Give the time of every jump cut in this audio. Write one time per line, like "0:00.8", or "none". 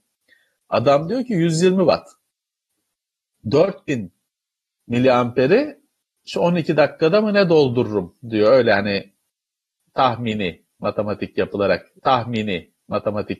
0:12.0